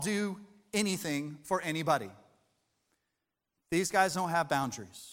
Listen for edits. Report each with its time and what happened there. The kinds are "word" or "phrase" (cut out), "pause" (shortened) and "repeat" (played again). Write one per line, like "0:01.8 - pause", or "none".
none